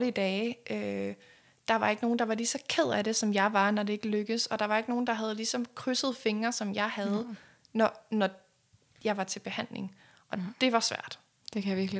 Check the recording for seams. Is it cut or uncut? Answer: uncut